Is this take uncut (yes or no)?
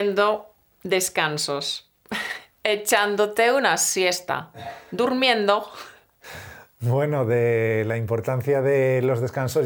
yes